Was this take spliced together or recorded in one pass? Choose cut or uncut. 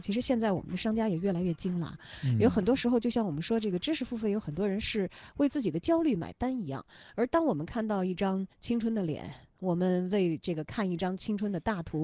cut